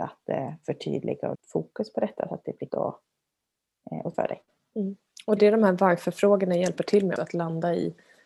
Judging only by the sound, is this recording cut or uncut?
cut